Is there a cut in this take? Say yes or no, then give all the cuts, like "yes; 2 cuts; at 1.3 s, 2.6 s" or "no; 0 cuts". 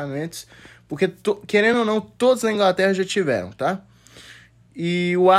no; 0 cuts